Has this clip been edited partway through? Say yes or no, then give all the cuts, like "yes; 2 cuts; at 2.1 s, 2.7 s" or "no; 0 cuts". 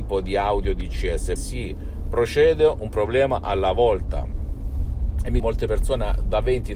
yes; 2 cuts; at 1.4 s, 5.4 s